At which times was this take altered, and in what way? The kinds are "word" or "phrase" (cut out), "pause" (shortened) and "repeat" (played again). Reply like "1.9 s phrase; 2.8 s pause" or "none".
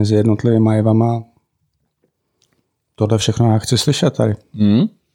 none